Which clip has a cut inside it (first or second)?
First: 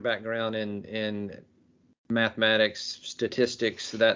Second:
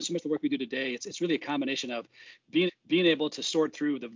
second